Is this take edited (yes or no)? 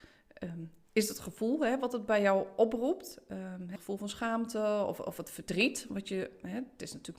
yes